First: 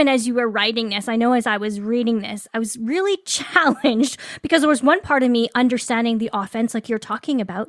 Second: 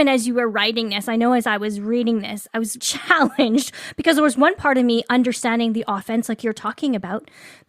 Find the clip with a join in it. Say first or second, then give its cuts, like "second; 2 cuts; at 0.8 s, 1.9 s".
second; 1 cut; at 2.8 s